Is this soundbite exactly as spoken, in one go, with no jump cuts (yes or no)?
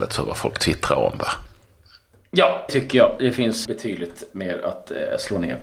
no